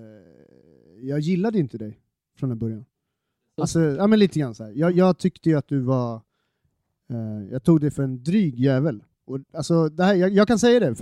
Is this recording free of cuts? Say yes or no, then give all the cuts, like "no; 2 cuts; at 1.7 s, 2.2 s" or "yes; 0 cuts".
no; 1 cut; at 9.1 s